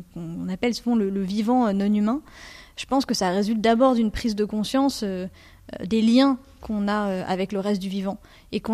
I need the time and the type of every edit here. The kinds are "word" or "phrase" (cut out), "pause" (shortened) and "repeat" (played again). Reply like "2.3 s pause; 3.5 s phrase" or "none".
none